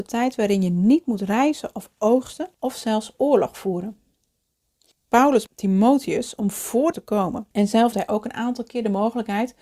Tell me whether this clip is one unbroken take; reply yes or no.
no